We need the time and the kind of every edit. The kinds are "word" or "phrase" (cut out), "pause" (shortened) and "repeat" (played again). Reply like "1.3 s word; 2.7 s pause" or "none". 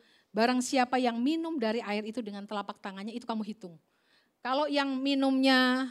none